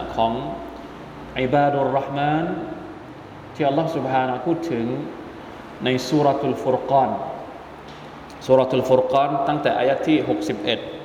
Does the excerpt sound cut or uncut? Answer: cut